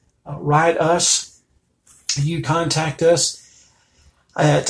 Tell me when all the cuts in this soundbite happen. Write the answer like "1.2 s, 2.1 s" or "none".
2.4 s